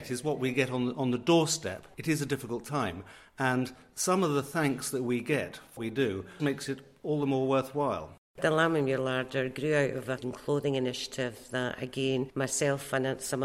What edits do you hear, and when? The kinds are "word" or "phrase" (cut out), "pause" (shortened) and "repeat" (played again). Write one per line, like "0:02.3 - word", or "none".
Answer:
0:05.8 - word
0:06.4 - word
0:10.2 - word